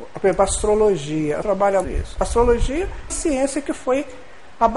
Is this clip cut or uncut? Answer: cut